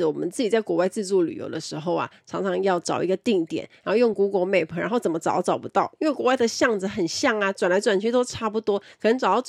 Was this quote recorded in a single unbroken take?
yes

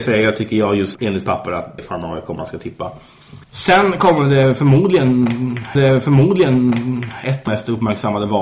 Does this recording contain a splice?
yes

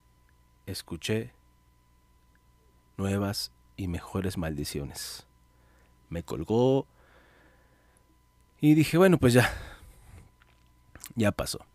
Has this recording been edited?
no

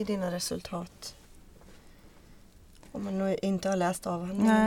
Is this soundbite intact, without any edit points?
yes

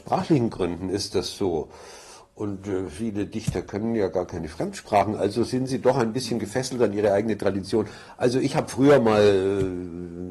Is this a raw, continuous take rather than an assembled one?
yes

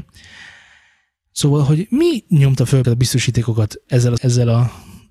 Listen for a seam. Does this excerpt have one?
yes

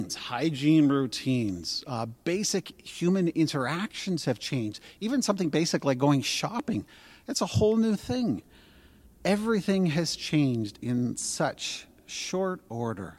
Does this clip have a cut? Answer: no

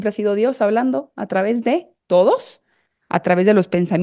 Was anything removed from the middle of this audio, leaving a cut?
no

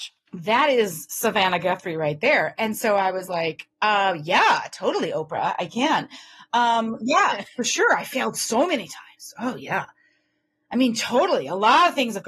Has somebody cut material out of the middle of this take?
no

